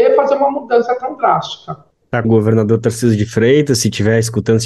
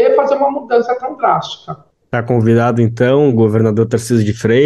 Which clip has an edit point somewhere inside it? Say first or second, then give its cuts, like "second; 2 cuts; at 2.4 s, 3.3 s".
first; 1 cut; at 2.2 s